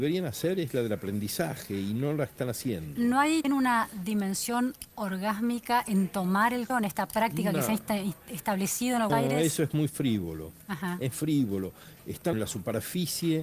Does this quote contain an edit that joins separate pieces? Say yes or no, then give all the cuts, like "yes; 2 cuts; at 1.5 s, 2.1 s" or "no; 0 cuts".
yes; 6 cuts; at 3.4 s, 4.9 s, 6.7 s, 9.1 s, 11.1 s, 12.3 s